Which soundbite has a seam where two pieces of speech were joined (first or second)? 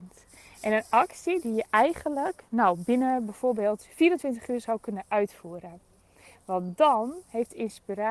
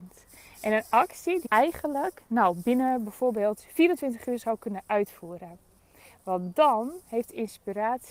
second